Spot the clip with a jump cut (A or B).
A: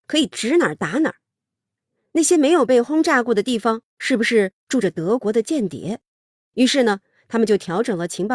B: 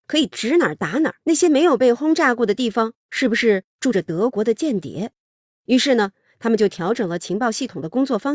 B